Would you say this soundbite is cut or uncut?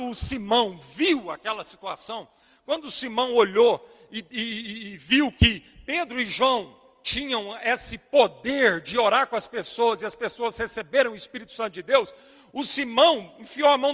uncut